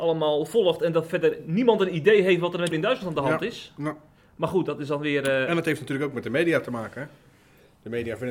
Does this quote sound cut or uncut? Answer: cut